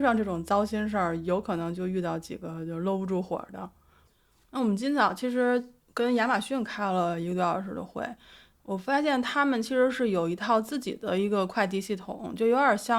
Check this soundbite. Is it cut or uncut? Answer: uncut